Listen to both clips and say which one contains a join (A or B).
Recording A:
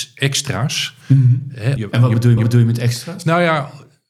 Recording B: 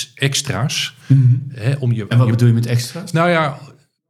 A